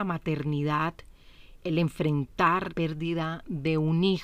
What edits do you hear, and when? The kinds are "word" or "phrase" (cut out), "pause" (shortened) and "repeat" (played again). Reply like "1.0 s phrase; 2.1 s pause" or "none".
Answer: 1.6 s word; 2.7 s word